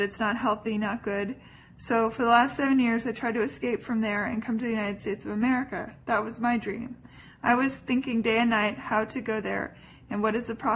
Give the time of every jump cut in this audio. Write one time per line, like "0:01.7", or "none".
none